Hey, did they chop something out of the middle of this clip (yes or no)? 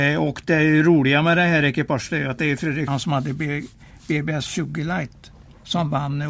yes